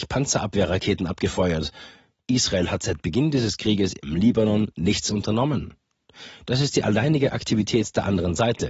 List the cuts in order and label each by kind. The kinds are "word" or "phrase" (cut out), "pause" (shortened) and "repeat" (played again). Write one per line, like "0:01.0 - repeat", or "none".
none